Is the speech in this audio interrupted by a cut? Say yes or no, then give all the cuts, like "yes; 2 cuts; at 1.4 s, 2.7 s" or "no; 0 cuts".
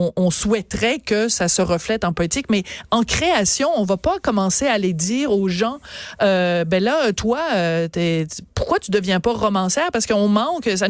no; 0 cuts